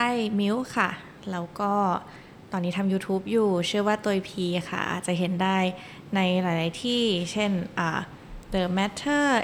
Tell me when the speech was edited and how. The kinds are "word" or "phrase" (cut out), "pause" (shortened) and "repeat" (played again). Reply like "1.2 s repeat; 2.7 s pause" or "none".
none